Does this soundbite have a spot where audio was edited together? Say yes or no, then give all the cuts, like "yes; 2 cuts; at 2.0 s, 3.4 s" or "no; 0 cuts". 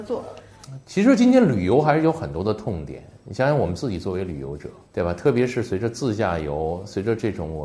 yes; 1 cut; at 4.8 s